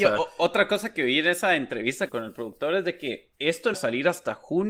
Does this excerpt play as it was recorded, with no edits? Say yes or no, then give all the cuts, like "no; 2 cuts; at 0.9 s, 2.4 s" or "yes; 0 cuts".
no; 3 cuts; at 2.1 s, 3.3 s, 3.7 s